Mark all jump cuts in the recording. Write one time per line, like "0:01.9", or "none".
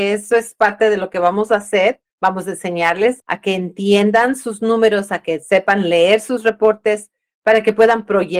0:02.1
0:03.2